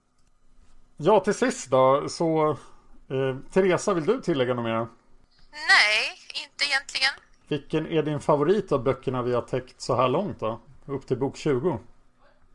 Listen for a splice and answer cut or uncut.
uncut